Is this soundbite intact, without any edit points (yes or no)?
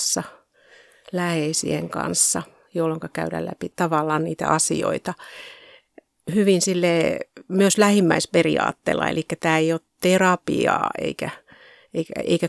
yes